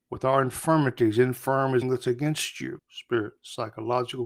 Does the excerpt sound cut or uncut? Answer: cut